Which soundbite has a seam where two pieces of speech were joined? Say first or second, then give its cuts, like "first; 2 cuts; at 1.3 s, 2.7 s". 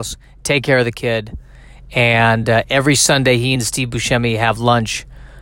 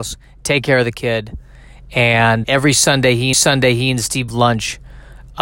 second; 3 cuts; at 2.4 s, 3.3 s, 4.3 s